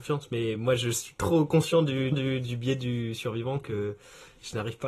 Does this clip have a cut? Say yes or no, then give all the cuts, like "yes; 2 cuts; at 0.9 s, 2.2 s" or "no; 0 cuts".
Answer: yes; 1 cut; at 2.1 s